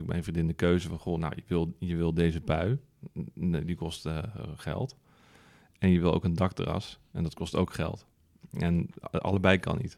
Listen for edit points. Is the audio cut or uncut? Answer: uncut